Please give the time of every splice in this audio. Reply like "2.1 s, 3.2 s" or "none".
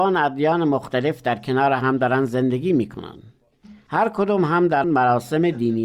4.8 s